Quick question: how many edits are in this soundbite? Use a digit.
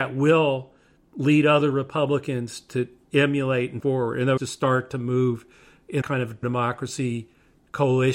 4